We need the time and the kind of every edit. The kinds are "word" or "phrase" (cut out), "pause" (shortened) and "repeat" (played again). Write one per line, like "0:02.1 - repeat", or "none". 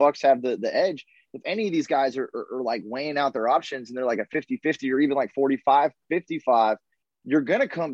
none